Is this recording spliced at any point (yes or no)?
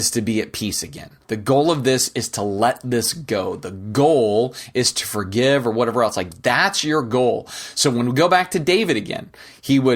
yes